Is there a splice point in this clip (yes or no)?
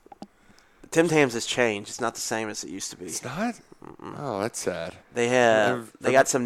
yes